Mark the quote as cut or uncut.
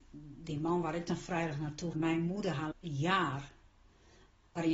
cut